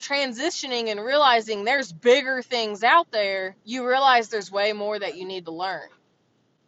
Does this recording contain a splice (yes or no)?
yes